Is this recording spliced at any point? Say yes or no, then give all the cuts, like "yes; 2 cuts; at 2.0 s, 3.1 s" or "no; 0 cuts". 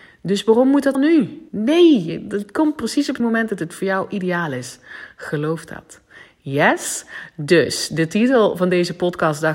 yes; 3 cuts; at 0.9 s, 1.5 s, 3.2 s